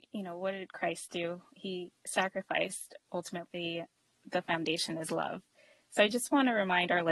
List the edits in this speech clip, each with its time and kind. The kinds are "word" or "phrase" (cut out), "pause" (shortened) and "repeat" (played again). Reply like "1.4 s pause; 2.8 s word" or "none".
none